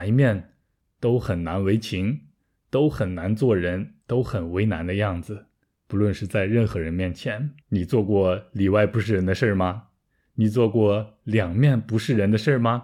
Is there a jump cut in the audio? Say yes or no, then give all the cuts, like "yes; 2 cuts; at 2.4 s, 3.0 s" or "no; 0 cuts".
yes; 2 cuts; at 4.0 s, 7.6 s